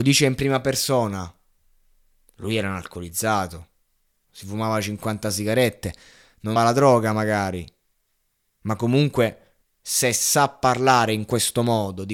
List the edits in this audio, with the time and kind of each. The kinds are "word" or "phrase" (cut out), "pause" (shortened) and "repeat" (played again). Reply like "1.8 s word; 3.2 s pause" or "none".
6.6 s word; 9.6 s pause